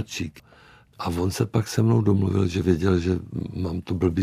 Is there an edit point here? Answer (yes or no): no